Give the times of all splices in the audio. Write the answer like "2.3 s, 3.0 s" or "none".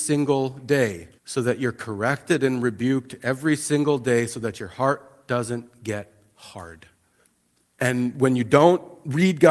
1.2 s, 7.2 s